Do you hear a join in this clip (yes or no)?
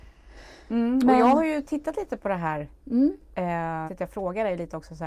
yes